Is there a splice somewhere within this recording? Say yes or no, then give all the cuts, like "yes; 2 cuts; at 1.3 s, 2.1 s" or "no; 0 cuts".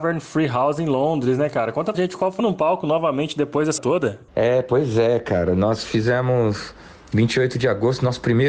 yes; 4 cuts; at 1.9 s, 2.4 s, 3.8 s, 4.3 s